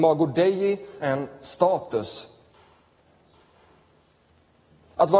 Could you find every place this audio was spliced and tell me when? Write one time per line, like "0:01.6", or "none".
0:01.0